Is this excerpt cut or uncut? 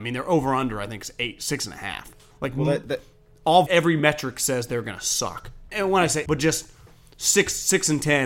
cut